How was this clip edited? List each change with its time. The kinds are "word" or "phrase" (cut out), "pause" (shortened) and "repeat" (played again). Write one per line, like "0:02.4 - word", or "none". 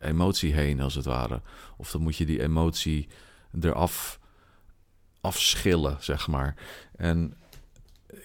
none

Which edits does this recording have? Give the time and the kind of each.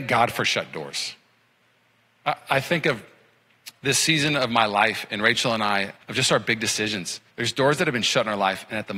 0:06.0 - pause
0:07.3 - pause

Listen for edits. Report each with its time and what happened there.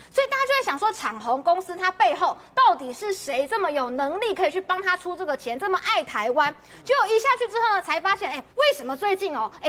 0:08.5 - pause

